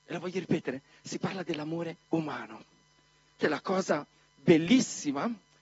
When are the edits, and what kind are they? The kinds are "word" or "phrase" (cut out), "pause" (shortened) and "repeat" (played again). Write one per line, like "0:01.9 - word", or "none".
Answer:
0:02.1 - pause
0:03.4 - word